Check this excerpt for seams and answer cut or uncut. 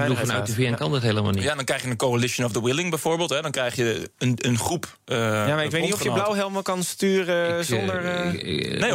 uncut